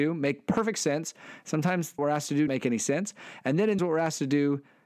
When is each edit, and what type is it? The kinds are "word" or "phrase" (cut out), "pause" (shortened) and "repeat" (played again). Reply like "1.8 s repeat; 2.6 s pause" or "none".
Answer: 2.0 s word; 2.5 s word; 3.8 s phrase